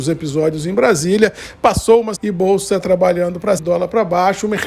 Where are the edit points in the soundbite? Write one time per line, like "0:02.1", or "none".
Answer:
0:02.2
0:02.8
0:03.6